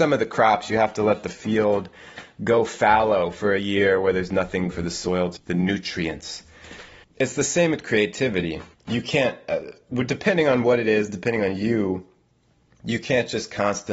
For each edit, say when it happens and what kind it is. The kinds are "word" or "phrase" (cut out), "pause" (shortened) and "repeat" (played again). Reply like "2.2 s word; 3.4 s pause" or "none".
4.7 s phrase; 5.4 s word; 7.0 s pause; 8.7 s pause